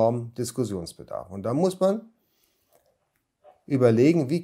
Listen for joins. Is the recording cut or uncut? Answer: uncut